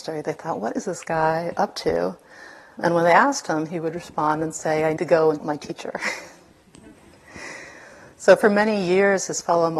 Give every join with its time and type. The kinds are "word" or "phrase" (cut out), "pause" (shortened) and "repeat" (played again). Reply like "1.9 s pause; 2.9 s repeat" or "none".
2.8 s word; 5.0 s word; 5.4 s word; 7.0 s pause